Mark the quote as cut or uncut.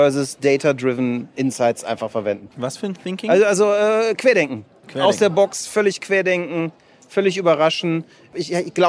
uncut